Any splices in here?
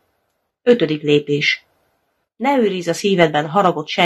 no; 0 cuts

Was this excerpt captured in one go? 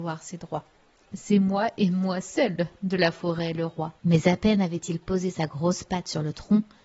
no; 1 cut; at 4.0 s

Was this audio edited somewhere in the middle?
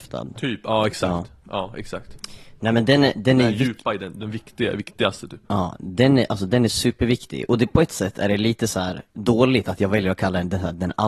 yes; 2 cuts; at 5.4 s, 9.1 s

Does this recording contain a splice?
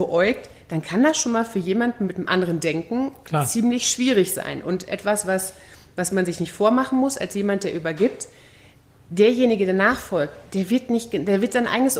no; 0 cuts

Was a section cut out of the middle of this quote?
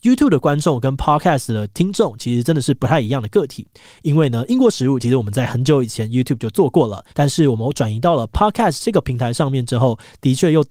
yes; 1 cut; at 7.1 s

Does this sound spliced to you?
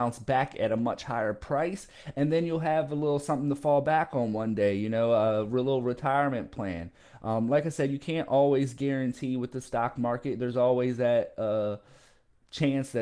no; 0 cuts

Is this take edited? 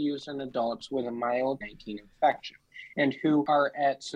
yes; 1 cut; at 1.6 s

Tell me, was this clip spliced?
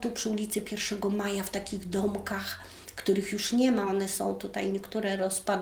no; 0 cuts

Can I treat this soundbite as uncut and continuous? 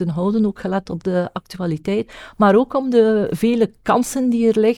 yes; 0 cuts

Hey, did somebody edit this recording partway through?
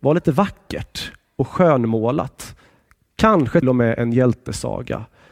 yes; 1 cut; at 3.6 s

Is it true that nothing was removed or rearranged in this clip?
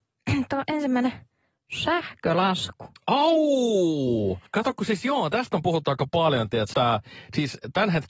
no; 2 cuts; at 4.5 s, 6.7 s

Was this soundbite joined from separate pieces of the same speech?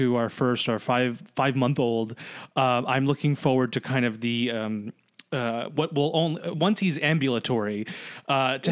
no; 0 cuts

